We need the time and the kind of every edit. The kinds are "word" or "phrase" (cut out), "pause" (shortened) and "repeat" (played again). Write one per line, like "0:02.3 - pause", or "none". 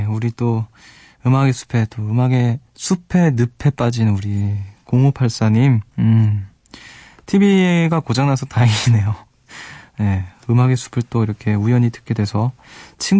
0:02.7 - pause
0:05.9 - pause